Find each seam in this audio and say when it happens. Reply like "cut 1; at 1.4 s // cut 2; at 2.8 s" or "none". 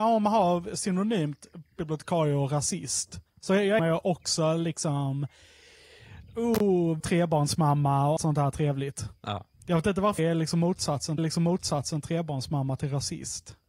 cut 1; at 3.3 s // cut 2; at 3.8 s // cut 3; at 7.0 s // cut 4; at 8.2 s // cut 5; at 10.2 s // cut 6; at 11.2 s